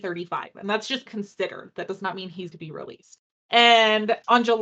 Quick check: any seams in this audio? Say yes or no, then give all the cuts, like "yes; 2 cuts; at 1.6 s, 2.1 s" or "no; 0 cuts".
yes; 2 cuts; at 1.1 s, 2.5 s